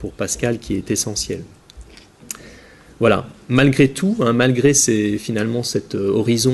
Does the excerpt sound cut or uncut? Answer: uncut